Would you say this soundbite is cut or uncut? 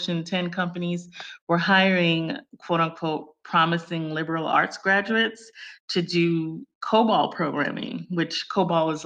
uncut